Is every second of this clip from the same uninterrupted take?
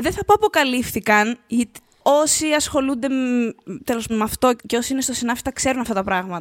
no; 2 cuts; at 4.1 s, 4.6 s

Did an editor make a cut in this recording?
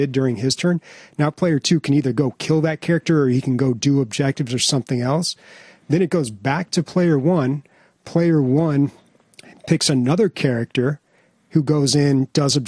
no; 0 cuts

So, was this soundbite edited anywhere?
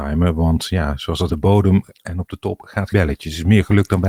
yes; 2 cuts; at 1.3 s, 2.9 s

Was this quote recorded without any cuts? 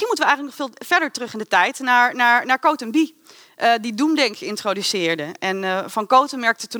yes; 0 cuts

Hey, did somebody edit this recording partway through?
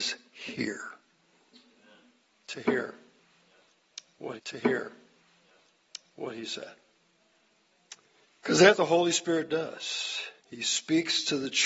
yes; 4 cuts; at 4.4 s, 8.2 s, 8.7 s, 10.4 s

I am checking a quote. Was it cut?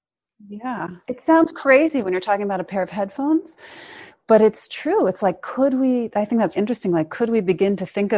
yes; 2 cuts; at 1.0 s, 6.6 s

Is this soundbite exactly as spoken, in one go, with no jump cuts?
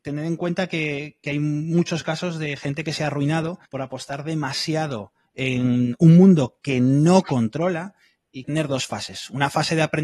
no; 2 cuts; at 3.7 s, 8.4 s

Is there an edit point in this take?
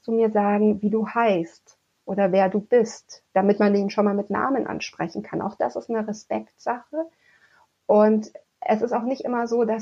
no; 0 cuts

